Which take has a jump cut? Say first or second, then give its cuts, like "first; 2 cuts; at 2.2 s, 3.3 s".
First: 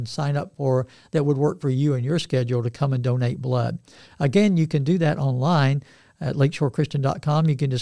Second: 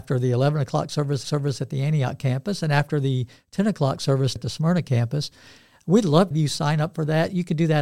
second; 3 cuts; at 1.2 s, 4.4 s, 6.3 s